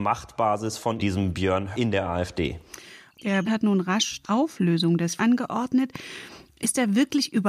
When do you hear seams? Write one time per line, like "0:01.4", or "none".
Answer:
0:01.0
0:01.7
0:03.4
0:04.2
0:05.2